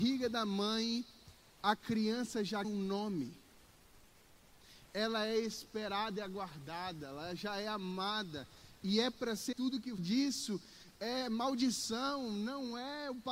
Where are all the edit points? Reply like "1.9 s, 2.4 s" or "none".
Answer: 2.6 s, 9.5 s, 10.0 s